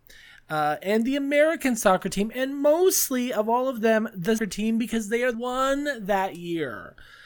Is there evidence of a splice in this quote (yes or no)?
yes